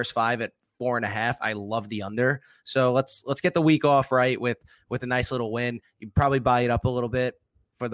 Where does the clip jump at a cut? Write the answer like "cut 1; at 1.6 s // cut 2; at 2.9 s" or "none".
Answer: none